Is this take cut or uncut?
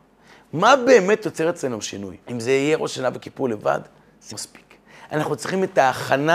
cut